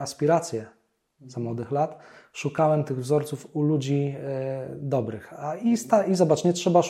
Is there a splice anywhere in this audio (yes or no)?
no